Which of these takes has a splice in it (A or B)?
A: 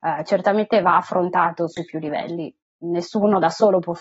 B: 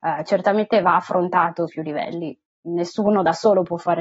B